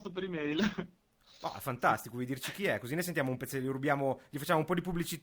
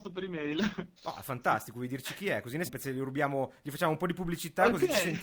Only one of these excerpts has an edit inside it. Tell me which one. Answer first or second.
second